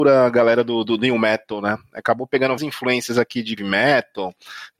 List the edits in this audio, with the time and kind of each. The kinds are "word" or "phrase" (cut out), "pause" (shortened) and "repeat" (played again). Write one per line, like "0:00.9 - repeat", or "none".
0:02.6 - word
0:03.6 - word